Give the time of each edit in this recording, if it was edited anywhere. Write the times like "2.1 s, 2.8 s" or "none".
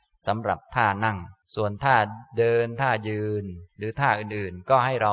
1.4 s